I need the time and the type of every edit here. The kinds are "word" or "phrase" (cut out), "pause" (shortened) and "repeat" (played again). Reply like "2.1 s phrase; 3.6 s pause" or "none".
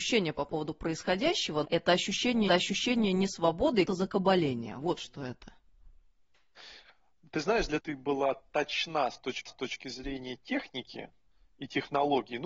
1.6 s word; 2.5 s repeat; 3.9 s word; 7.8 s phrase; 9.5 s repeat